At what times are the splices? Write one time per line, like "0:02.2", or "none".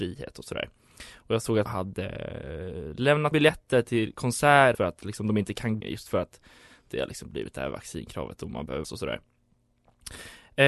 0:01.7
0:03.3
0:04.7
0:05.8
0:08.8